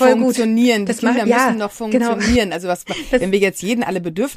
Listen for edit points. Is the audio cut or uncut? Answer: uncut